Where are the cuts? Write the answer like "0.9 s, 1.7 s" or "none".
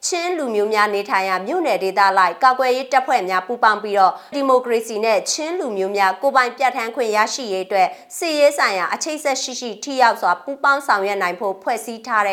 4.3 s

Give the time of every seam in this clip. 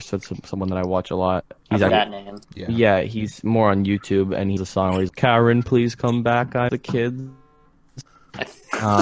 1.6 s, 1.9 s, 2.4 s, 4.6 s, 5.1 s, 6.7 s

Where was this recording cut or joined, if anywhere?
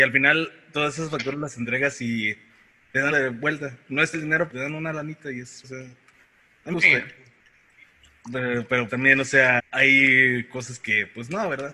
3.1 s, 4.1 s, 4.5 s, 5.6 s, 6.7 s, 8.9 s, 9.6 s

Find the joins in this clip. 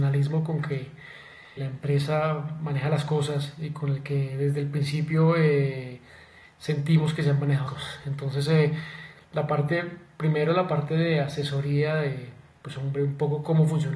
1.6 s, 7.7 s

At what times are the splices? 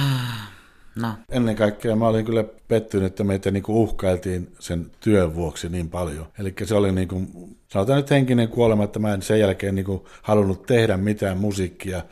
1.2 s, 2.6 s, 6.3 s

